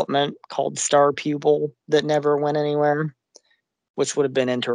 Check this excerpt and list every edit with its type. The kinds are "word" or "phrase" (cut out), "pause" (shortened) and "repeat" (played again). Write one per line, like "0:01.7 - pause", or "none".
none

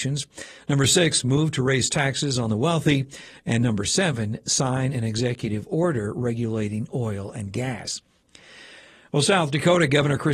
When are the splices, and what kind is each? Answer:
none

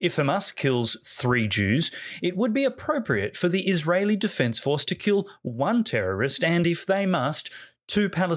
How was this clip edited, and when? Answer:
none

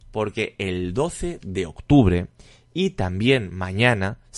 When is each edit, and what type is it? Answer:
none

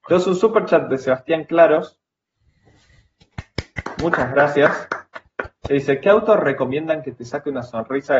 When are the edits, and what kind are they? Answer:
none

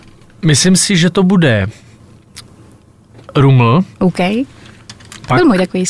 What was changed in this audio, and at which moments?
0:03.9 - pause

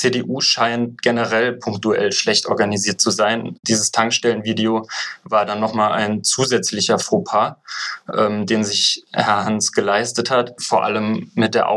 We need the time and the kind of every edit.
none

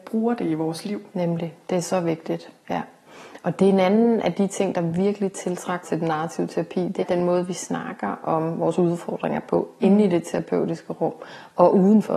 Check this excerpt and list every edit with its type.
0:05.8 - word
0:07.0 - word

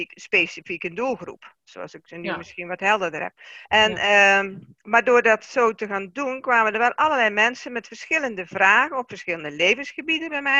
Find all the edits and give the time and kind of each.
0:03.6 - pause
0:04.8 - pause

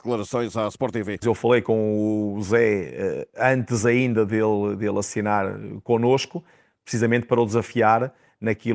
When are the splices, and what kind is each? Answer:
none

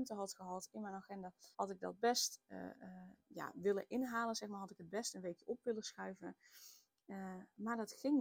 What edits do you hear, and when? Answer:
0:01.5 - pause
0:03.2 - pause

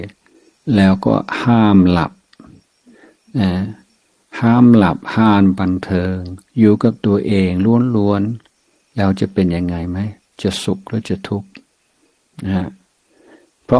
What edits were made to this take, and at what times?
none

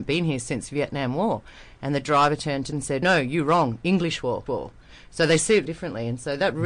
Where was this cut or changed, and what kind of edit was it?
0:02.7 - word
0:03.0 - word
0:04.5 - word
0:05.7 - word

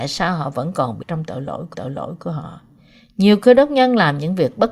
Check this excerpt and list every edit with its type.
0:01.0 - word
0:01.7 - repeat

